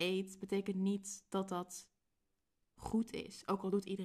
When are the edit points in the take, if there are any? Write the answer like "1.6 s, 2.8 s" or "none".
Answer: none